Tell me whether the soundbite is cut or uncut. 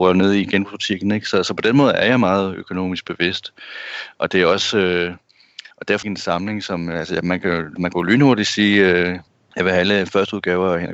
cut